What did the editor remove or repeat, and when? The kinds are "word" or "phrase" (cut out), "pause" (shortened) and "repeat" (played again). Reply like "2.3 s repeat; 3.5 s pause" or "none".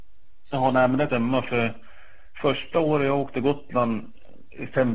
1.1 s phrase